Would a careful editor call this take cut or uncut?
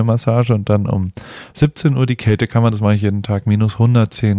uncut